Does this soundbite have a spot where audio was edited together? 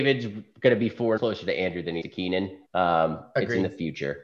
yes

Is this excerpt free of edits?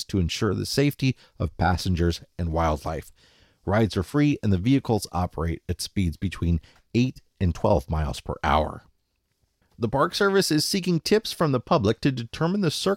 yes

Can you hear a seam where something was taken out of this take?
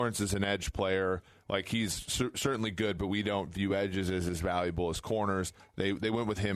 no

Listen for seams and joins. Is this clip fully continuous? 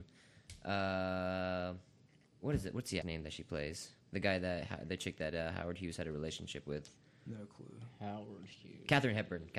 no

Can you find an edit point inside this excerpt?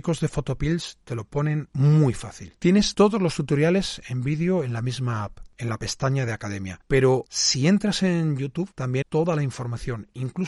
yes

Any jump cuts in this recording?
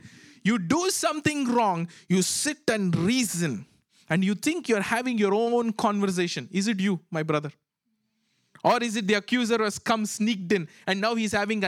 no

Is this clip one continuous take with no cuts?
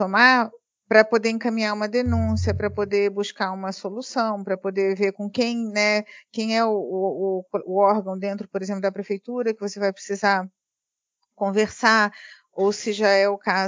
yes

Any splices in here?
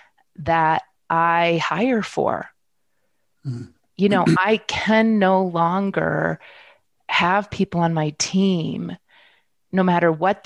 no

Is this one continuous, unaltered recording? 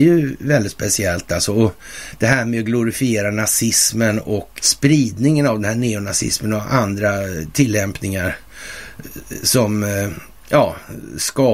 no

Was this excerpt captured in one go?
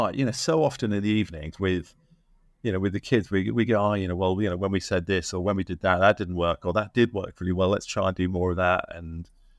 yes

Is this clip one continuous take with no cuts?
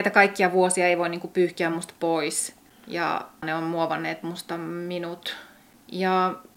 yes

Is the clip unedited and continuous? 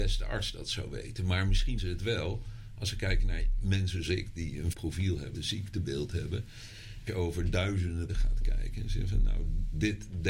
no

